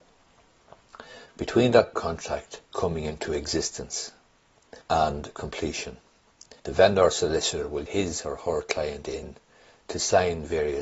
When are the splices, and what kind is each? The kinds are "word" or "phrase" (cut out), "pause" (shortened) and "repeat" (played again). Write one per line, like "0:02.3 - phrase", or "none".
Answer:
0:01.9 - word
0:02.7 - pause
0:04.8 - pause
0:06.6 - pause
0:07.9 - word